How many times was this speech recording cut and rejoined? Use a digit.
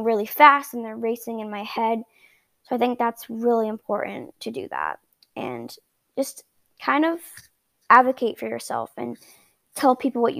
0